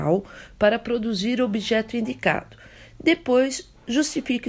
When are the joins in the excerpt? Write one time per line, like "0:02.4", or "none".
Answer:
none